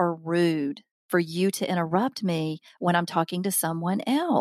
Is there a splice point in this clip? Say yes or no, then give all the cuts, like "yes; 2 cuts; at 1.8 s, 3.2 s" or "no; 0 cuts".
no; 0 cuts